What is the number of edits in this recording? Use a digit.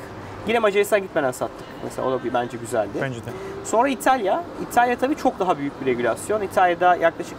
0